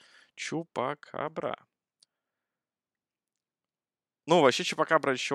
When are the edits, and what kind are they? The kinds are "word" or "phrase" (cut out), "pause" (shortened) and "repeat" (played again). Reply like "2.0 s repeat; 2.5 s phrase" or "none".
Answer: none